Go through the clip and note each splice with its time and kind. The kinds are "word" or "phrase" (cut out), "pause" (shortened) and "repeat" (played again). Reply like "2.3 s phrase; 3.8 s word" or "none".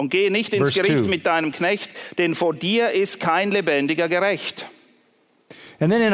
none